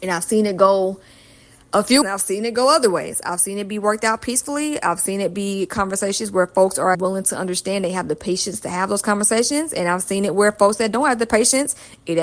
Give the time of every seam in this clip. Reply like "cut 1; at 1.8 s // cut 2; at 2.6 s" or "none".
cut 1; at 2.0 s // cut 2; at 6.9 s